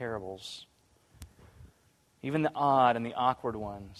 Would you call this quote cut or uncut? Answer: uncut